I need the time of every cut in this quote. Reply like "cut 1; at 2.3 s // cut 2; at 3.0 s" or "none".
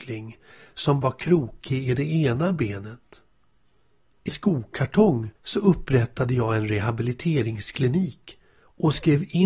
cut 1; at 1.0 s // cut 2; at 4.3 s // cut 3; at 5.4 s